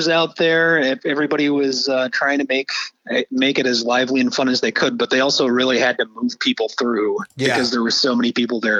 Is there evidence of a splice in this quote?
no; 0 cuts

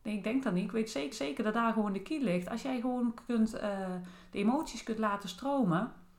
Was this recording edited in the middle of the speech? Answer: yes; 1 cut; at 1.1 s

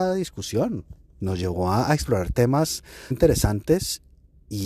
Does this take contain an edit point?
yes; 1 cut; at 3.1 s

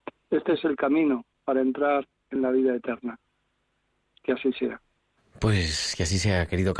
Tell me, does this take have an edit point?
no; 0 cuts

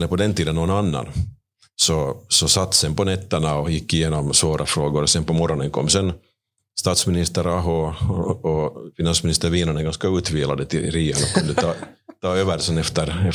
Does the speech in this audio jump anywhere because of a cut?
no; 0 cuts

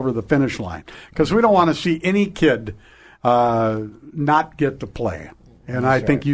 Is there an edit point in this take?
no; 0 cuts

